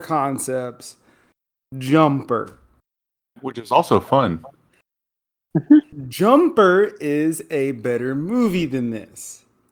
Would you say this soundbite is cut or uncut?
uncut